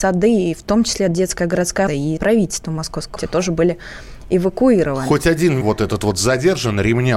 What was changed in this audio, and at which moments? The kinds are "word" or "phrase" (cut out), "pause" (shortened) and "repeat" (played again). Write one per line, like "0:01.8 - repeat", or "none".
0:01.1 - word
0:01.9 - word
0:02.2 - word
0:03.2 - word
0:05.6 - word